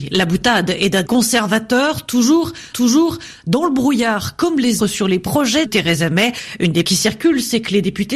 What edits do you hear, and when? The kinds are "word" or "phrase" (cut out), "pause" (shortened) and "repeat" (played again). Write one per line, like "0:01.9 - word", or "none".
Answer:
0:01.0 - word
0:02.7 - repeat
0:04.8 - word
0:05.6 - word
0:06.8 - word